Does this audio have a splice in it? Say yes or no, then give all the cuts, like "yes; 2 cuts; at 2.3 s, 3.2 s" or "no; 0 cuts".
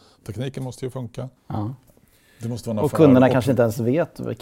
yes; 1 cut; at 1.4 s